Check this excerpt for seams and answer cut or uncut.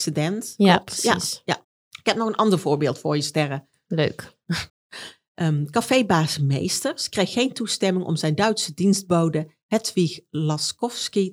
cut